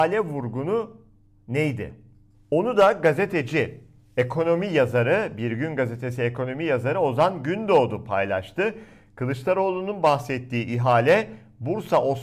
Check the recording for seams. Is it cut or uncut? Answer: uncut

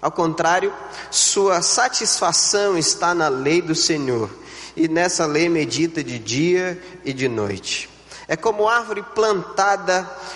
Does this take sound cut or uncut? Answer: uncut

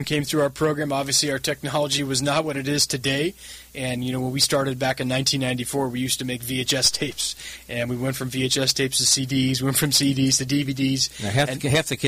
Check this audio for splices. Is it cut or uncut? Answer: uncut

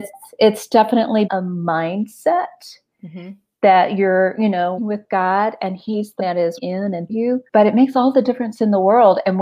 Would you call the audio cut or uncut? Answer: cut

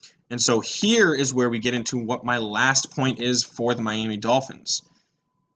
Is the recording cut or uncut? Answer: uncut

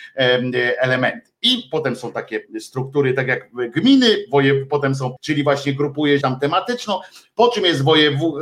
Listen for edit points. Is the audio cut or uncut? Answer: cut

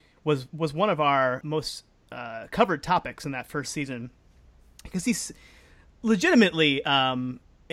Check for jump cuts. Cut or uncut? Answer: cut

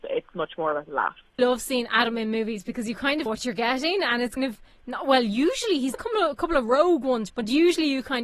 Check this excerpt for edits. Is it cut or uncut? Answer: cut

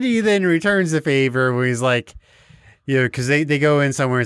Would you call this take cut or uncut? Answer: uncut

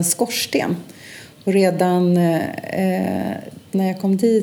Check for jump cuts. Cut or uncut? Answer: cut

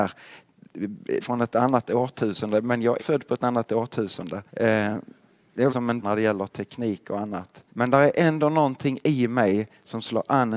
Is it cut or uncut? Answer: cut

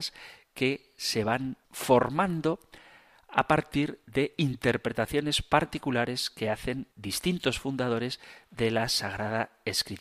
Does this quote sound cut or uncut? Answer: cut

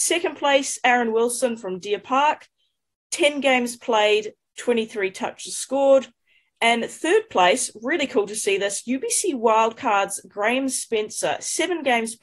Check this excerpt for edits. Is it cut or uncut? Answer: uncut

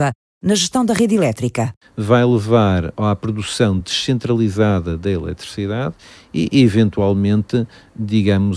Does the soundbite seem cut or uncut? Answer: uncut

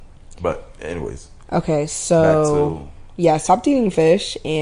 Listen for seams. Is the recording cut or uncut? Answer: uncut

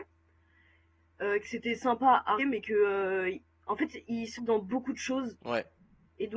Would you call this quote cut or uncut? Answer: cut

